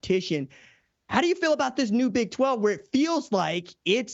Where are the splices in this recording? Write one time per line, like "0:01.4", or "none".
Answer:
none

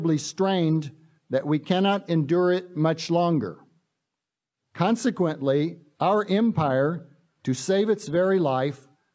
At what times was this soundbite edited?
none

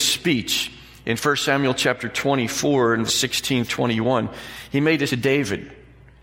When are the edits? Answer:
0:03.1
0:03.7
0:05.1

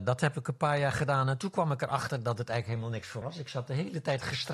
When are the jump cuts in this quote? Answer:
0:03.2

